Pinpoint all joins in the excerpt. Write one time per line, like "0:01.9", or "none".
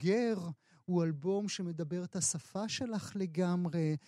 none